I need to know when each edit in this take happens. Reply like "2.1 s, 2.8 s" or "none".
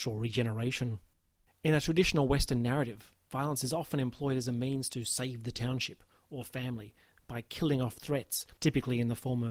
8.0 s